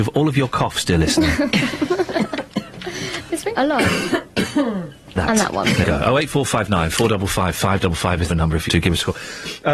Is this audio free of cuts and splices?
no; 5 cuts; at 3.6 s, 5.2 s, 5.8 s, 8.3 s, 8.7 s

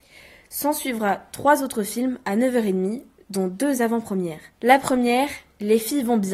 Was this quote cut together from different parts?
yes; 1 cut; at 4.5 s

